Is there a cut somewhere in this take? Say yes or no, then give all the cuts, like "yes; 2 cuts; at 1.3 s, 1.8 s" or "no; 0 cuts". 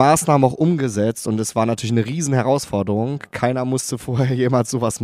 no; 0 cuts